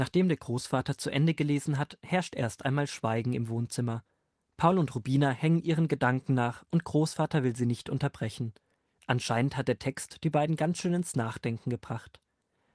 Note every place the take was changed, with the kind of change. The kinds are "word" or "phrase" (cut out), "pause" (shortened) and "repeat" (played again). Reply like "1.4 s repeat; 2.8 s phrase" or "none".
none